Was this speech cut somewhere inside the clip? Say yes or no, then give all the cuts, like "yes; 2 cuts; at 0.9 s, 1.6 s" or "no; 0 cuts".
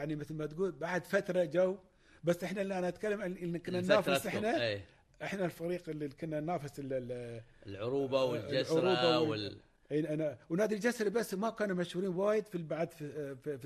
no; 0 cuts